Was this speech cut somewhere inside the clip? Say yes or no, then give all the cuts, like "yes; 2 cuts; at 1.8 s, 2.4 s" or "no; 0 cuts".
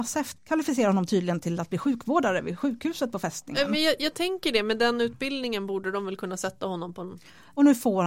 no; 0 cuts